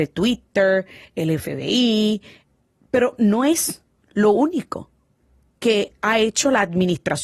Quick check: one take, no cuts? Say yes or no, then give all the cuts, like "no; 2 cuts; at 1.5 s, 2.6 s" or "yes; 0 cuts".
yes; 0 cuts